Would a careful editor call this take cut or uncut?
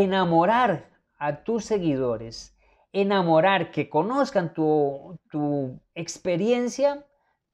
uncut